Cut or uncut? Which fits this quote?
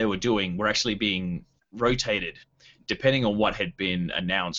uncut